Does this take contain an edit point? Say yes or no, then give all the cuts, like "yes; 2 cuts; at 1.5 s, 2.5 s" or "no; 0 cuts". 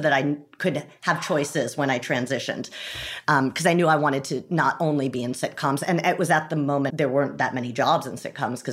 yes; 1 cut; at 6.9 s